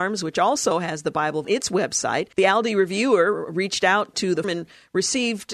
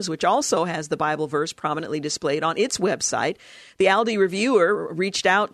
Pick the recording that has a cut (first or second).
first